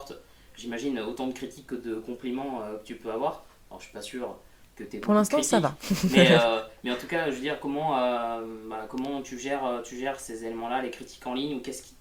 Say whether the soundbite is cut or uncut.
uncut